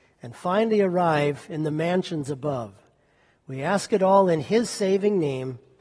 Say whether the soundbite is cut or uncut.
uncut